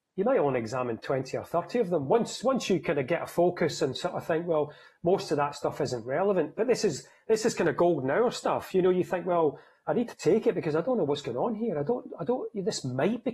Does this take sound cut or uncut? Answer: uncut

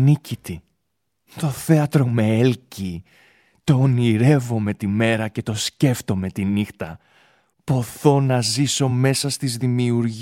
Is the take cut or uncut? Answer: uncut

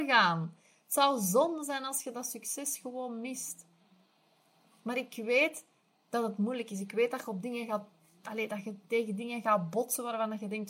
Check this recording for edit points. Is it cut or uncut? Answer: uncut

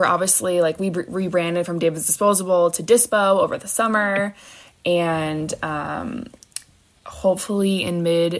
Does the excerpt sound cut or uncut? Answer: uncut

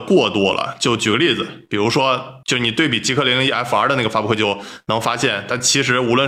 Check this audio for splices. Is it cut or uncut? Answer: uncut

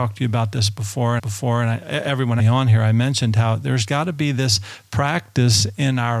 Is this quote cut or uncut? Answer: cut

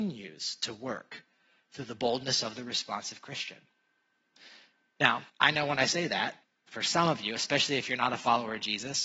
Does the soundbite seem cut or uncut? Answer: cut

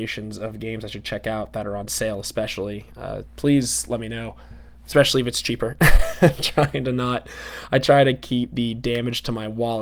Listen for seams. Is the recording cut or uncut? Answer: uncut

